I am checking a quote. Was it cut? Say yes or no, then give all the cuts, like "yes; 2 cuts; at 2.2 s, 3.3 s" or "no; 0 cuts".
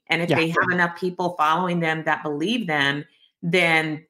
no; 0 cuts